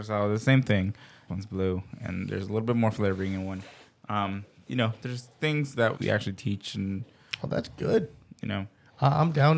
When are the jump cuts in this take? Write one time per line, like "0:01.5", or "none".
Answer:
0:01.3
0:04.7
0:05.4
0:05.9